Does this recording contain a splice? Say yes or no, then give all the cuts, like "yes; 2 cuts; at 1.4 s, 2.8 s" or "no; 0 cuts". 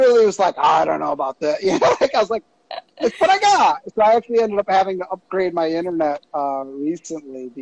yes; 1 cut; at 6.3 s